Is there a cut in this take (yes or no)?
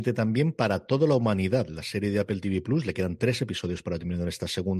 no